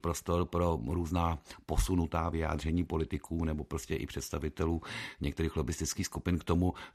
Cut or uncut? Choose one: uncut